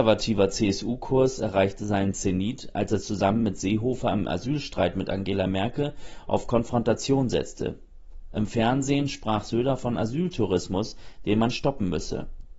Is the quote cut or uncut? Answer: uncut